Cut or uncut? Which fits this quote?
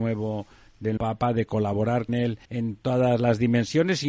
cut